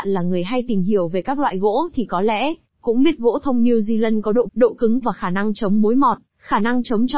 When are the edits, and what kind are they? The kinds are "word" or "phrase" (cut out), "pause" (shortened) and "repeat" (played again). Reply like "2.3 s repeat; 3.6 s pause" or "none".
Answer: 4.5 s word; 5.0 s word